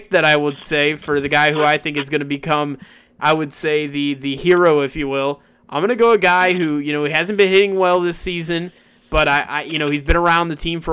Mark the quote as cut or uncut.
uncut